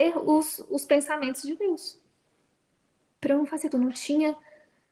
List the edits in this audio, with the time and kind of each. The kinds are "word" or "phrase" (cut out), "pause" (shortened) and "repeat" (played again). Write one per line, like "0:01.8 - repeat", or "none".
0:03.7 - word